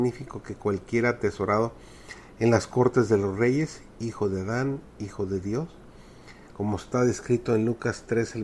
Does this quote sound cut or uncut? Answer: uncut